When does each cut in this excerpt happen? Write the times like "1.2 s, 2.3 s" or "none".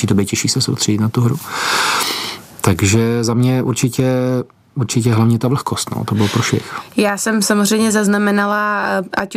none